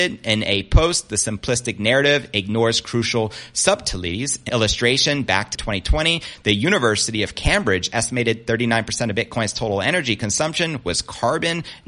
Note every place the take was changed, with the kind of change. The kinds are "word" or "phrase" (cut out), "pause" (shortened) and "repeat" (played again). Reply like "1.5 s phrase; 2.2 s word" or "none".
4.5 s word; 5.5 s word